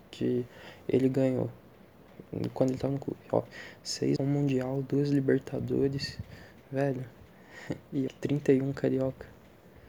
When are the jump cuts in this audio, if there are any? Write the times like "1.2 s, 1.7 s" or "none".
4.2 s, 8.1 s